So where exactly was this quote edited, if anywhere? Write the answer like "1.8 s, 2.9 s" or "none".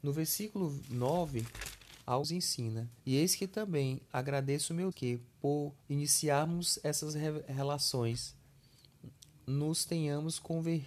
2.2 s, 3.0 s, 4.1 s, 4.9 s, 5.8 s